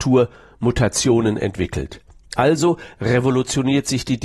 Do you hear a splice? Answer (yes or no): no